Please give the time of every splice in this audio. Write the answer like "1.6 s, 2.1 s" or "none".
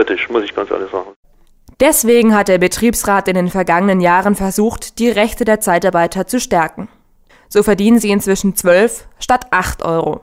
none